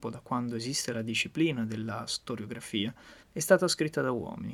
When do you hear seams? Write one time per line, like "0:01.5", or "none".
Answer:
0:03.2

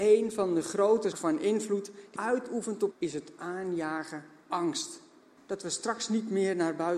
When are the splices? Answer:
0:01.1
0:02.2
0:02.9
0:04.5
0:05.4

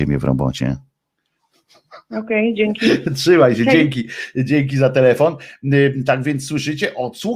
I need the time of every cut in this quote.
none

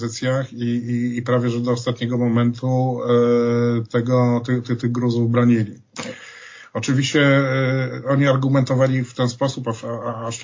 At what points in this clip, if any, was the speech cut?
none

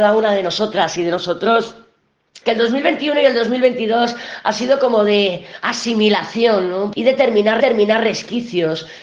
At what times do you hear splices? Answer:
0:02.4
0:06.9
0:07.6

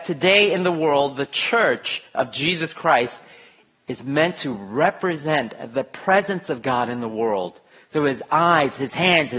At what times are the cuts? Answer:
none

